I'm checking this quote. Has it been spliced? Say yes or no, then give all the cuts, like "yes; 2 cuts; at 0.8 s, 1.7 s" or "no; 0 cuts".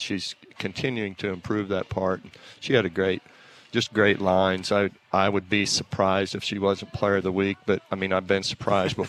no; 0 cuts